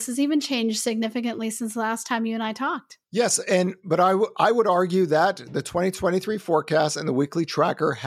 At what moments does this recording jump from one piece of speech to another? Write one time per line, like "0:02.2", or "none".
0:03.0